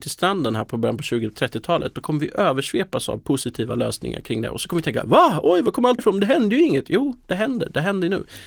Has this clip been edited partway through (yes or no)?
yes